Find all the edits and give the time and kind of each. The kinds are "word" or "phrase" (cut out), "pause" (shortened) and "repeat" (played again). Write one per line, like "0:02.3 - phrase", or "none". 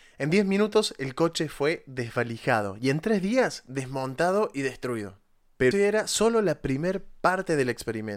0:05.7 - word